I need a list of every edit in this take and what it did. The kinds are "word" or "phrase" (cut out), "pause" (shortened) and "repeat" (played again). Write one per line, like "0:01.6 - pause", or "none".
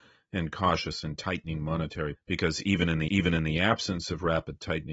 0:02.1 - word
0:03.1 - repeat